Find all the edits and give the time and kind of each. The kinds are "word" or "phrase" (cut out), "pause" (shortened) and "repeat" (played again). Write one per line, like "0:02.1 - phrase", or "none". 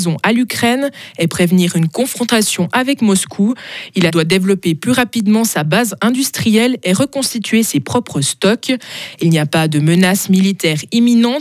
0:04.1 - phrase